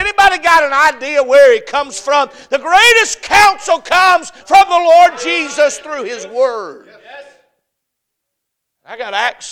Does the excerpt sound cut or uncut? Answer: uncut